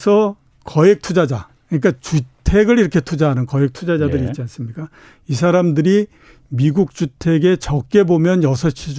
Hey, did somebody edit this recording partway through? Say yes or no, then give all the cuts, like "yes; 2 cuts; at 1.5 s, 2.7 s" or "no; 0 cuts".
yes; 1 cut; at 1.6 s